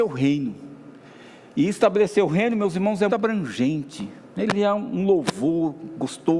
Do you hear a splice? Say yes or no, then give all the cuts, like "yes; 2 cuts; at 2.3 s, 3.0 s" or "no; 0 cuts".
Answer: yes; 1 cut; at 3.1 s